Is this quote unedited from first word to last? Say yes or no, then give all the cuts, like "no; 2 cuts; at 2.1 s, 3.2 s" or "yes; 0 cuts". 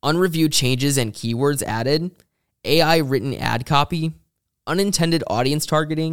yes; 0 cuts